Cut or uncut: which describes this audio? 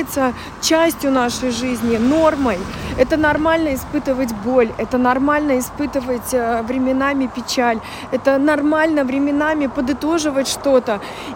uncut